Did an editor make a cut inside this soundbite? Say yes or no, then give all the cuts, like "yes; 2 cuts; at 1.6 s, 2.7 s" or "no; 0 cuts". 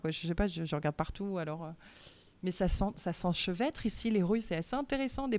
no; 0 cuts